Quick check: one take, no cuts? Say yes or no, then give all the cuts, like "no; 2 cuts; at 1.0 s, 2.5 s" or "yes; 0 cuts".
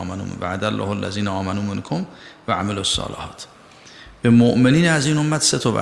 yes; 0 cuts